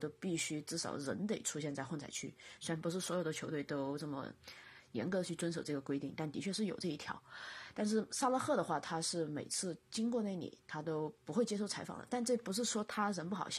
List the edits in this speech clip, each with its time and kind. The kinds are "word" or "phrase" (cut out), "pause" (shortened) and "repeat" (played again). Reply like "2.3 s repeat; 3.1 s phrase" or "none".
11.2 s pause